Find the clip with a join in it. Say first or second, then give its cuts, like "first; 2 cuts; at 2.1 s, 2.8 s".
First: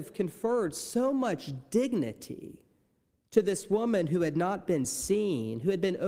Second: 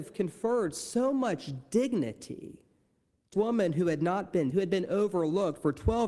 second; 2 cuts; at 3.3 s, 4.5 s